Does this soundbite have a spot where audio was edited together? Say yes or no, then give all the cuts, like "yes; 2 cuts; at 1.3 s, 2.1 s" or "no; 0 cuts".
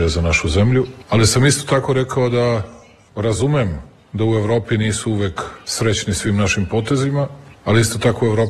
no; 0 cuts